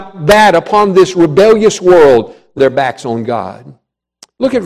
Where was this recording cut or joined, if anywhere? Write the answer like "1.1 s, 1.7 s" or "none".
2.6 s

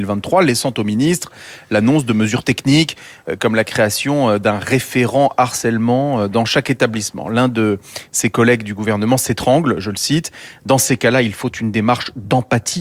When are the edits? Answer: none

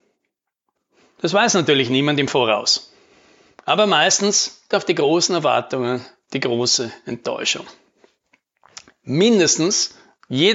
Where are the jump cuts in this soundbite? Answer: 4.7 s

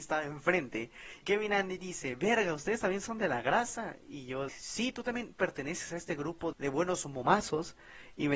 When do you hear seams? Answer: 1.2 s, 4.5 s, 6.5 s

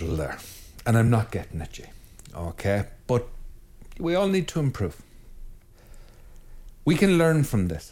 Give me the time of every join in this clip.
none

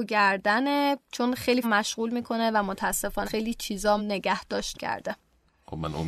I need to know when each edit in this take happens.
1.0 s, 1.6 s, 3.2 s, 4.0 s, 4.7 s

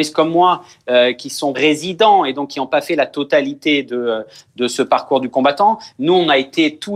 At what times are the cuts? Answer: 1.5 s

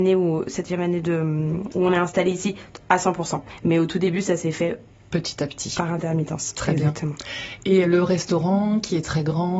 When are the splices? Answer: 7.8 s

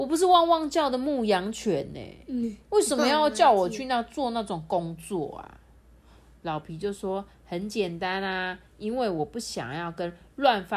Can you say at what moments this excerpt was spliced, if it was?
none

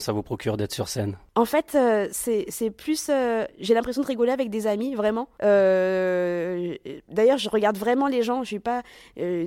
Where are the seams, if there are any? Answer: 5.3 s

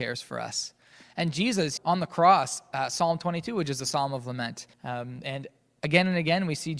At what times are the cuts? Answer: 1.8 s, 4.7 s

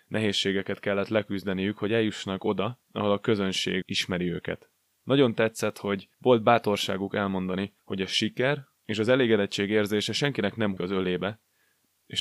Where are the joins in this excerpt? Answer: 2.8 s, 3.8 s, 4.9 s, 6.1 s, 7.8 s, 8.8 s, 10.8 s

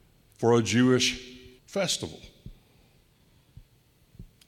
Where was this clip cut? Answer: 1.6 s

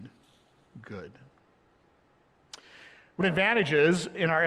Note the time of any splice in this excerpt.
3.2 s

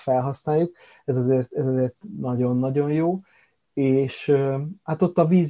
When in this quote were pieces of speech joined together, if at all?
none

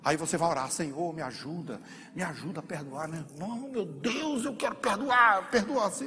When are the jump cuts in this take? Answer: none

